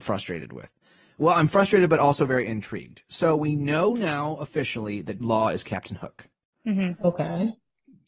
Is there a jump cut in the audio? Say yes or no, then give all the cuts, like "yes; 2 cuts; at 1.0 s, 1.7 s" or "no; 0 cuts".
yes; 1 cut; at 5.2 s